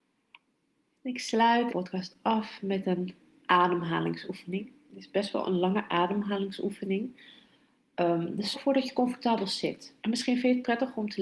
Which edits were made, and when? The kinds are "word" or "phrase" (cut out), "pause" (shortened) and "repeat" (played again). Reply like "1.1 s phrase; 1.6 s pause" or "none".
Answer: 1.7 s word; 8.5 s word; 10.0 s pause